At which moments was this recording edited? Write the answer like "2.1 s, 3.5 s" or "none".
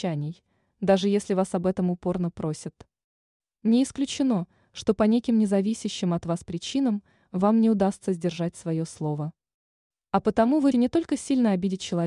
10.7 s